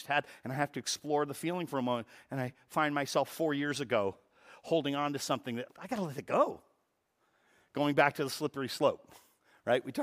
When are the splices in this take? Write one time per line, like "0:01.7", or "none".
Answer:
0:05.7